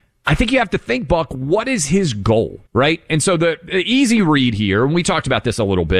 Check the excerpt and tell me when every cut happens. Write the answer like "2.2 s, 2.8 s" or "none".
2.7 s